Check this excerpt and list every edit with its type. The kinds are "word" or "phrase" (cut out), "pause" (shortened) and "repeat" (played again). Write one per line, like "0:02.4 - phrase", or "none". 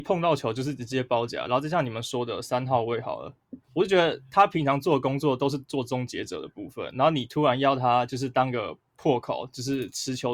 0:03.6 - pause